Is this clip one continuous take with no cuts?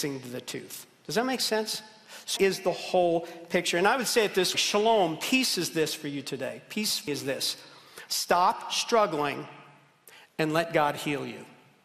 no; 3 cuts; at 2.4 s, 4.5 s, 7.1 s

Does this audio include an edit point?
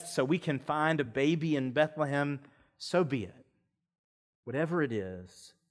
no; 0 cuts

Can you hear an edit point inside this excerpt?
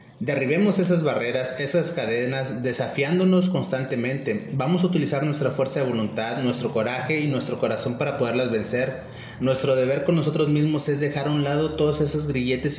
no; 0 cuts

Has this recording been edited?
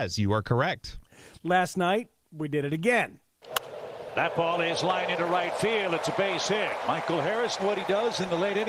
yes; 1 cut; at 7.6 s

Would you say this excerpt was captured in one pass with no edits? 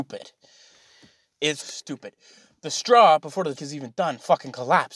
no; 2 cuts; at 1.6 s, 3.6 s

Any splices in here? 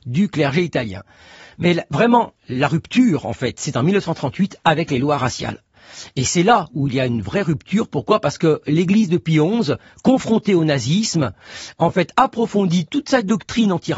no; 0 cuts

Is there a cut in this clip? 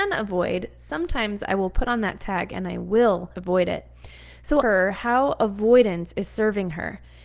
yes; 2 cuts; at 3.3 s, 4.6 s

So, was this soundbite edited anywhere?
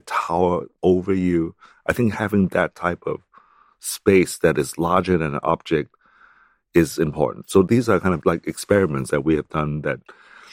no; 0 cuts

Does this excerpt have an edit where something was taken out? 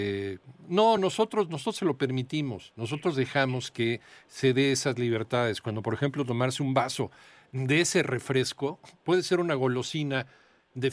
no; 0 cuts

